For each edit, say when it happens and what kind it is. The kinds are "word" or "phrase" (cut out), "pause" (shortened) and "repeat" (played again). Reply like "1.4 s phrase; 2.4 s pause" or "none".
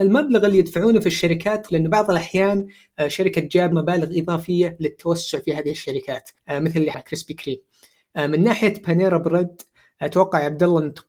1.7 s phrase; 3.7 s word; 6.4 s pause; 6.9 s word